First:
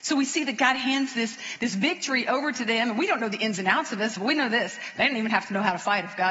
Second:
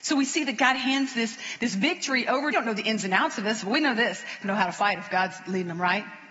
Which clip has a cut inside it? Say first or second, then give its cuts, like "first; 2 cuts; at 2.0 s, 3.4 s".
second; 2 cuts; at 2.5 s, 4.4 s